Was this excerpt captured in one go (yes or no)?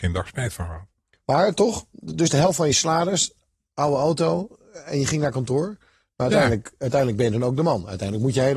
yes